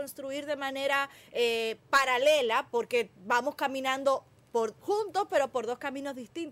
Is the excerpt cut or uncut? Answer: uncut